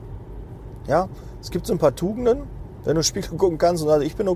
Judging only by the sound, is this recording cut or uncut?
uncut